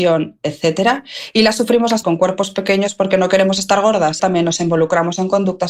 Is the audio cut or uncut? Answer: cut